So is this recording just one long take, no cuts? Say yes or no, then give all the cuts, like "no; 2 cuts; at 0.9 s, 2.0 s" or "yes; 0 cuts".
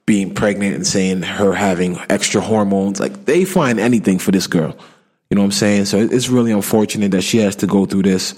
yes; 0 cuts